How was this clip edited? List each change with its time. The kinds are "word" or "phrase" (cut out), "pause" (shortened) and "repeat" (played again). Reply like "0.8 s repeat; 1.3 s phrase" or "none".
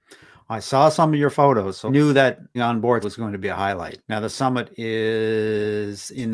1.9 s word; 2.5 s word; 3.0 s word; 4.3 s word